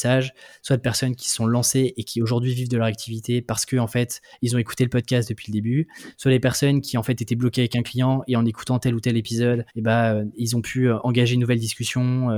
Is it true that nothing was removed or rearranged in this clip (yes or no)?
no